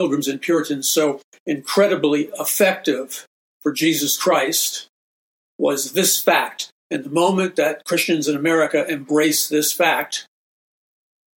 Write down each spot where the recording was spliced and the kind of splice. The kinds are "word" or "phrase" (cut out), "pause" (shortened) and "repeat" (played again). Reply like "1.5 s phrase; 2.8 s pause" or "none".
3.4 s pause